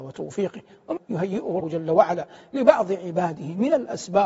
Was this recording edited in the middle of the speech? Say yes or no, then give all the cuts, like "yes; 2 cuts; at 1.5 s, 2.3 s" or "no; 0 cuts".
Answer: yes; 2 cuts; at 1.0 s, 1.6 s